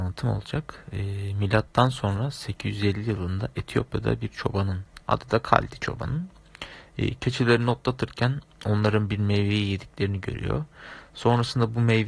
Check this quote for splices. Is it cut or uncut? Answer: uncut